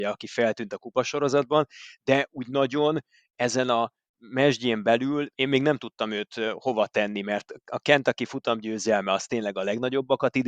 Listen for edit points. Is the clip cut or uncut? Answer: uncut